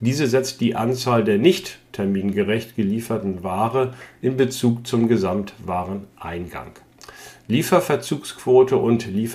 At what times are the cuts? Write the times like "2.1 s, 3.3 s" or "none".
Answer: none